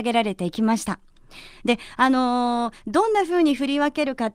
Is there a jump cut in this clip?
no; 0 cuts

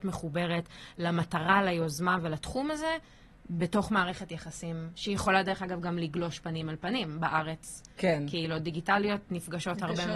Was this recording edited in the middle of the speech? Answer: no; 0 cuts

